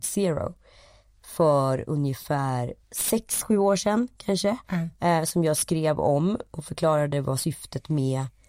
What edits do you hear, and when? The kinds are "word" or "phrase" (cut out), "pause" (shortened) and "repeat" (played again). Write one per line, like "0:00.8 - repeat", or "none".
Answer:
0:02.8 - pause
0:04.6 - pause